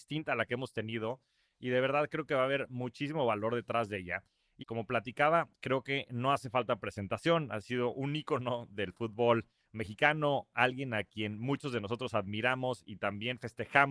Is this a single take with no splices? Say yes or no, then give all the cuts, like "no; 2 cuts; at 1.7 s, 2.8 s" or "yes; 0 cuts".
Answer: no; 1 cut; at 4.6 s